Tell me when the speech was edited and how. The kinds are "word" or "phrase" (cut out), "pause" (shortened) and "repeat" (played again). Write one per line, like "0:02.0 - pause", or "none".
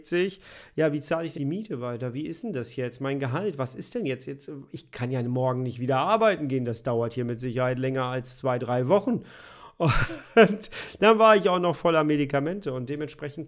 0:01.4 - word